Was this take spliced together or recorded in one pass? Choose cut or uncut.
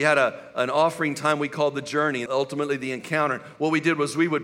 cut